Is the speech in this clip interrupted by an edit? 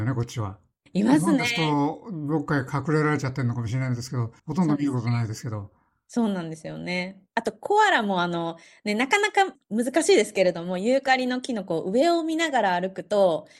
yes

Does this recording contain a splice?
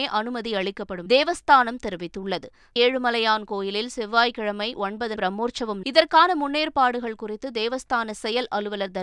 yes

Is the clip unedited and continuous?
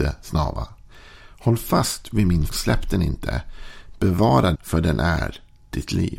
no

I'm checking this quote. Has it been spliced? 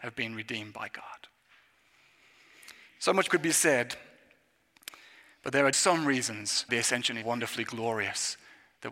yes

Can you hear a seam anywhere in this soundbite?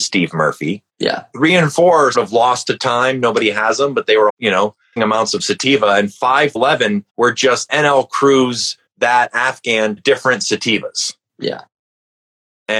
yes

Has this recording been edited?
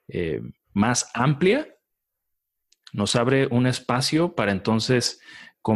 no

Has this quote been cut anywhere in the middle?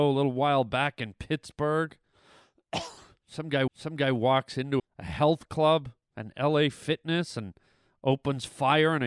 yes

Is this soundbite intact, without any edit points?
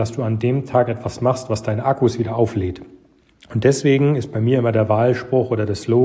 yes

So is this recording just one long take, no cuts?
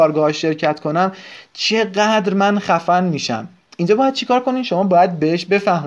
yes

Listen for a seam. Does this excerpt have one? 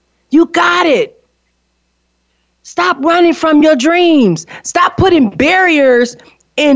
no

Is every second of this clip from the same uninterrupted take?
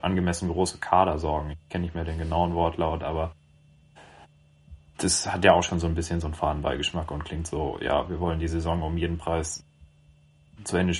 yes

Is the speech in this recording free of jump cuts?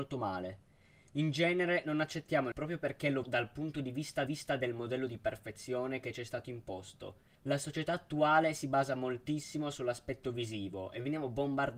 no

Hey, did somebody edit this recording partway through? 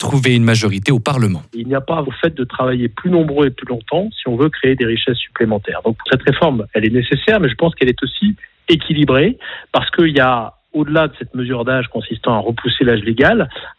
yes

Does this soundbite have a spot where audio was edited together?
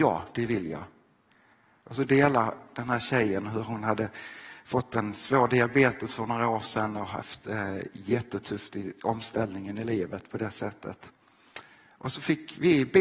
no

